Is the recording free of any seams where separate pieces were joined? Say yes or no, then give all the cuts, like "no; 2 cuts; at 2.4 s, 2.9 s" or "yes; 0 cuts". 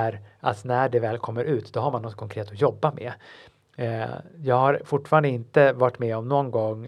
yes; 0 cuts